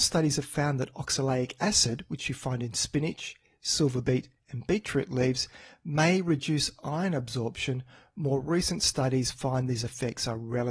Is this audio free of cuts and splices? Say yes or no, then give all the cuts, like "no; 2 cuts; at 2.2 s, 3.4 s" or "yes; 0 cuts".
yes; 0 cuts